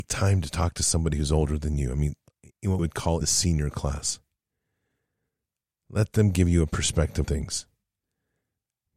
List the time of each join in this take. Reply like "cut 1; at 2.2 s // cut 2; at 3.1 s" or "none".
cut 1; at 2.8 s // cut 2; at 3.2 s // cut 3; at 7.2 s